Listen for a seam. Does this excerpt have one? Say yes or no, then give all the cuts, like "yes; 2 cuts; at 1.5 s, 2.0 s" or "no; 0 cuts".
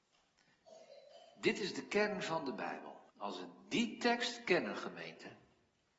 yes; 1 cut; at 3.1 s